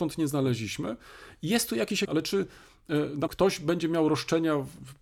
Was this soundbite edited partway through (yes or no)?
yes